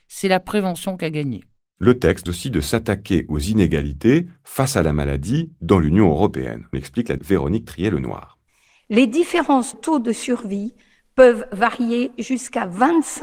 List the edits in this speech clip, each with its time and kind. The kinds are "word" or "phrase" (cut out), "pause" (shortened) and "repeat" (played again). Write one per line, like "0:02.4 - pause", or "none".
0:02.3 - word
0:06.7 - word
0:07.2 - word
0:09.7 - word